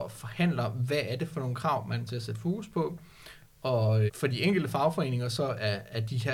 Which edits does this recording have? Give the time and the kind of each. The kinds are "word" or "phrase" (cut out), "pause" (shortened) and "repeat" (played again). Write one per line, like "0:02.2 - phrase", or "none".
0:02.1 - word
0:04.1 - word